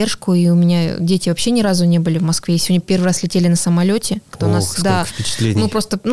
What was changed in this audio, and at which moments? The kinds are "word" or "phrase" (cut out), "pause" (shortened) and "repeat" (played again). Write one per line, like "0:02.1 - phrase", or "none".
none

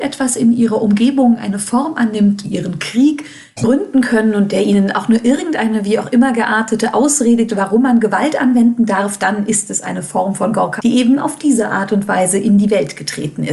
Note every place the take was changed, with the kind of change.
0:02.4 - phrase
0:07.5 - word
0:10.8 - word

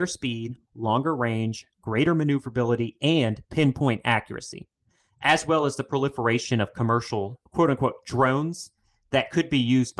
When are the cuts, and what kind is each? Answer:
0:07.5 - pause

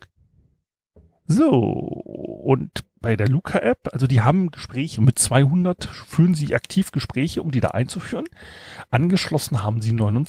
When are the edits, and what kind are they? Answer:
0:05.0 - word

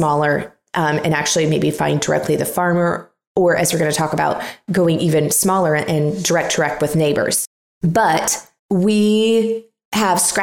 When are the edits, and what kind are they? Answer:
0:08.6 - pause

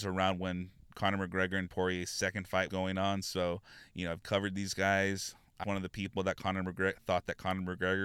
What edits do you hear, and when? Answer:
0:01.7 - word
0:02.7 - word
0:04.2 - word
0:05.6 - word

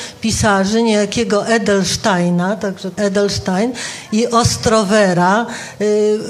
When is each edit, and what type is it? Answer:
0:03.0 - word

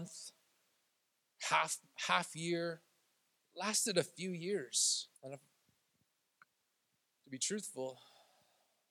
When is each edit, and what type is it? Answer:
0:05.2 - pause

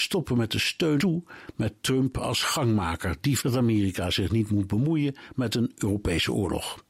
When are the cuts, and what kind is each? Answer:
0:01.0 - word
0:03.4 - word

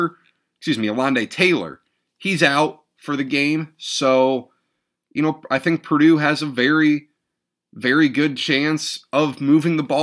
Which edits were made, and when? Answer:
none

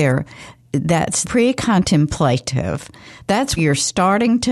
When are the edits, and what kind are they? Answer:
0:01.2 - word
0:03.6 - word

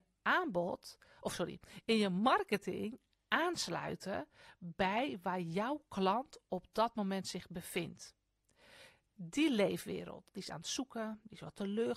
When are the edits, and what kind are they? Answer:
none

